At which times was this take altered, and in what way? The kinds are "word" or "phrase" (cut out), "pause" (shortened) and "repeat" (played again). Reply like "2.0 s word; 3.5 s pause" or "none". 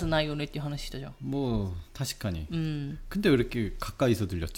1.9 s pause